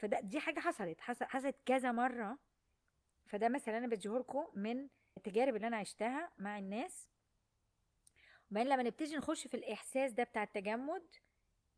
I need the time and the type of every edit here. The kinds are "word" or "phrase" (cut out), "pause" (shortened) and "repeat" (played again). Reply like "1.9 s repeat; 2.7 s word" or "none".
5.2 s word